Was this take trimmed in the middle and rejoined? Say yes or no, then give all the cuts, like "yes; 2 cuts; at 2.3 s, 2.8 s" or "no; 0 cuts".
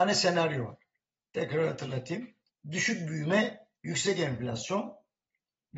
yes; 2 cuts; at 2.5 s, 3.8 s